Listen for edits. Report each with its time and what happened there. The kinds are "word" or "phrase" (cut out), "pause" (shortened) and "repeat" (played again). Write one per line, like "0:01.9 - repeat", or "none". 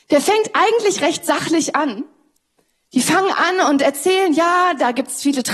none